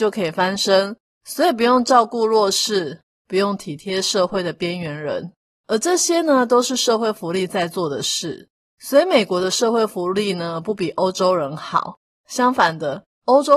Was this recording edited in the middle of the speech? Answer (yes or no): no